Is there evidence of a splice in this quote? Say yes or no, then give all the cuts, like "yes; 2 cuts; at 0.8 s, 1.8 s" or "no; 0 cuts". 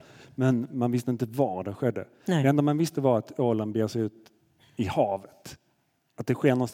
no; 0 cuts